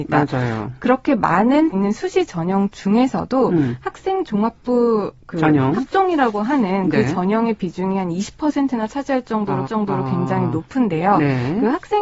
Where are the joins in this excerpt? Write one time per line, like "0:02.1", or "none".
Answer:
0:01.7
0:09.6